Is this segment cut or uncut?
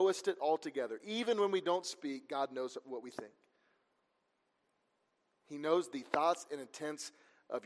uncut